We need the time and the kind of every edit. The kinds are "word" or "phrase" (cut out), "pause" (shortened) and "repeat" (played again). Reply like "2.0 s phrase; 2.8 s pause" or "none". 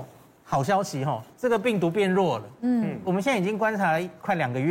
1.3 s pause